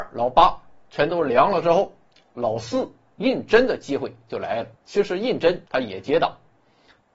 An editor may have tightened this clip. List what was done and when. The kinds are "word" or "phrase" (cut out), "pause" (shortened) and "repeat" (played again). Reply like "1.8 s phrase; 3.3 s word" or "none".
4.7 s pause; 5.7 s pause